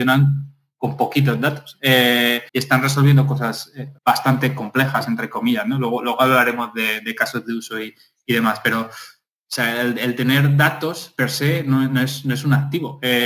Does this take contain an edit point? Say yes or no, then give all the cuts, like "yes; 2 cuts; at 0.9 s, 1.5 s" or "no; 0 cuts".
yes; 2 cuts; at 2.5 s, 4.0 s